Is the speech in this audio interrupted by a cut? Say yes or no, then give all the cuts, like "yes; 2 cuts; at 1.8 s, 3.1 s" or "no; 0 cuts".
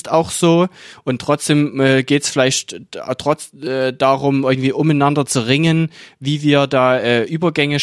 no; 0 cuts